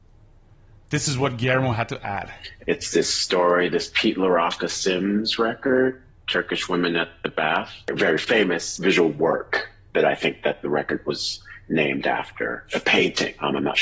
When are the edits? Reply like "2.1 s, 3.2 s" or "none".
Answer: none